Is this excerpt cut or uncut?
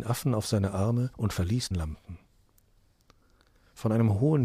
cut